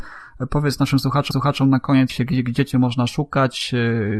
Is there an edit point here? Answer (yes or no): yes